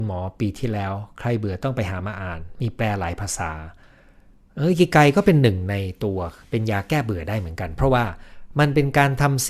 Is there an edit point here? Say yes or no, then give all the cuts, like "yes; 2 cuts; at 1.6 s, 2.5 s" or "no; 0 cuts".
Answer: yes; 1 cut; at 6.4 s